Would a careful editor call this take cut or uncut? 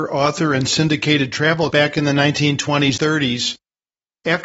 cut